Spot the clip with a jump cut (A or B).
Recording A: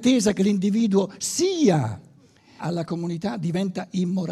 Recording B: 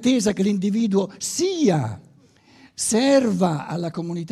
A